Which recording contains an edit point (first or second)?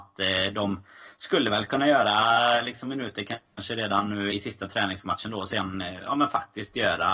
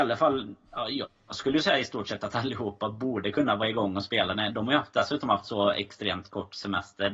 first